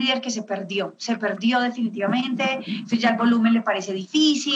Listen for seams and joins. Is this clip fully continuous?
yes; 0 cuts

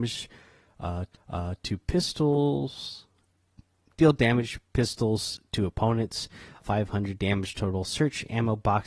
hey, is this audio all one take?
no; 2 cuts; at 1.1 s, 6.6 s

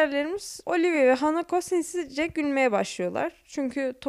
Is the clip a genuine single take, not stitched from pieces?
yes; 0 cuts

